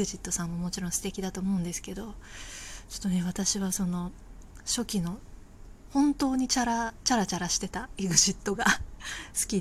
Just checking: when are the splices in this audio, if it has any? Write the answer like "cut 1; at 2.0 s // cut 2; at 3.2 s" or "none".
none